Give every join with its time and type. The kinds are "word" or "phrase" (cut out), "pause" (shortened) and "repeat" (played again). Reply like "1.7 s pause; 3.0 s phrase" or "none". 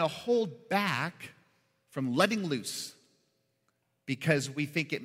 none